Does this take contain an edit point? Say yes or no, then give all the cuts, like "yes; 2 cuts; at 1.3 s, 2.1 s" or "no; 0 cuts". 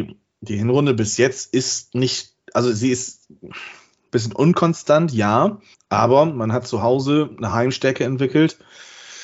yes; 1 cut; at 5.7 s